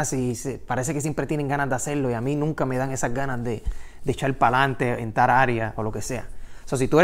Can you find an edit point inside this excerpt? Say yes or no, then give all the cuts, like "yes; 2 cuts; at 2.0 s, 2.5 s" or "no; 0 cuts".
no; 0 cuts